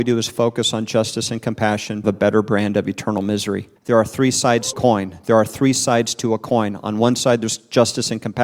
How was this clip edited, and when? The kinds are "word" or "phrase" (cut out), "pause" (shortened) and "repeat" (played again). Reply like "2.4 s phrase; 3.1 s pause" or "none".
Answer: 2.0 s phrase; 3.8 s pause; 4.7 s phrase

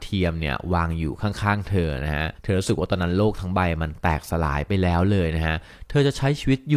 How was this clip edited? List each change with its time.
2.3 s pause

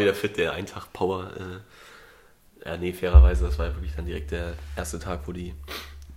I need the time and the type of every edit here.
none

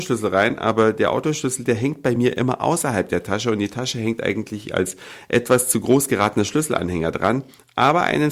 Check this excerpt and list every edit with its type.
none

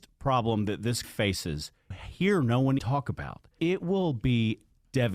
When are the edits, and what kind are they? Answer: 1.0 s word; 1.9 s word; 2.8 s word; 3.6 s word

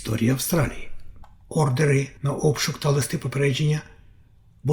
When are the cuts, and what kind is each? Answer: 2.2 s pause

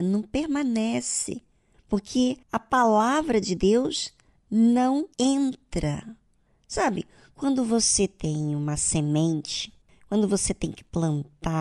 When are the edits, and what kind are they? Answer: 2.4 s pause; 5.1 s pause; 9.8 s pause

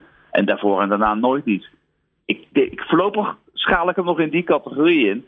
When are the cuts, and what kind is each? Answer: none

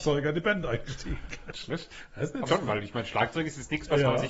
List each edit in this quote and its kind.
1.5 s word; 2.5 s word

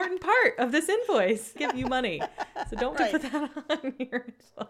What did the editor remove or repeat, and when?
1.6 s phrase; 2.9 s word

